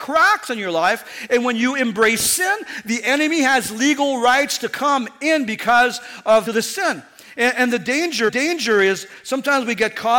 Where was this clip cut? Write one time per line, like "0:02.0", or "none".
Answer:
0:06.5
0:08.3